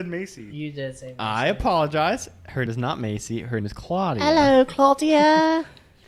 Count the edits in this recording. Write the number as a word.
two